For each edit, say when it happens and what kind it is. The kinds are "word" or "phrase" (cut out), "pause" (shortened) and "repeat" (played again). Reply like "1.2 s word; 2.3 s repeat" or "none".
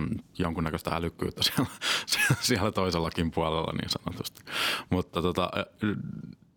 none